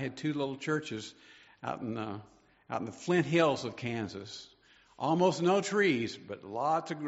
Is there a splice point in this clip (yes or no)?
no